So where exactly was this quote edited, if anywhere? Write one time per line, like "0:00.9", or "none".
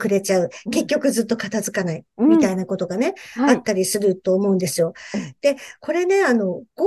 none